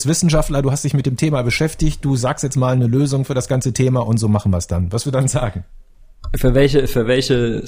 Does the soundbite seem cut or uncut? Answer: cut